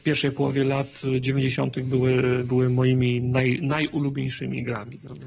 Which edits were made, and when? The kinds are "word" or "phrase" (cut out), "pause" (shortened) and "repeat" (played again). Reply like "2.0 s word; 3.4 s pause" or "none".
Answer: none